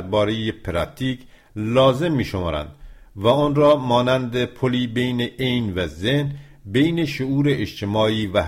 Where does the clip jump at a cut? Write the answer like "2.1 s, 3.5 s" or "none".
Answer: none